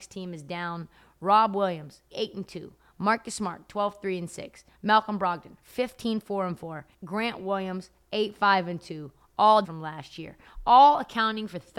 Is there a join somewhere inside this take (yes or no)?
yes